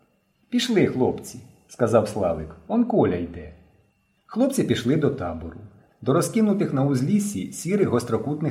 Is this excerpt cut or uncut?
uncut